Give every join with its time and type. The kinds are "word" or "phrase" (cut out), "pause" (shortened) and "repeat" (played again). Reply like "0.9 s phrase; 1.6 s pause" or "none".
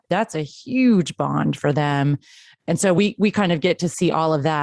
none